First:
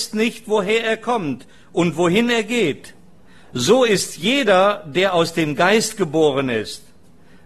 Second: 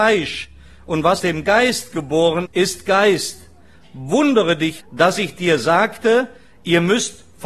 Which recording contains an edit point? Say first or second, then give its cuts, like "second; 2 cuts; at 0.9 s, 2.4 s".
second; 3 cuts; at 1.2 s, 2.5 s, 4.8 s